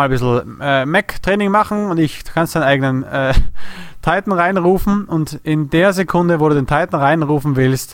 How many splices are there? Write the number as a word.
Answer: zero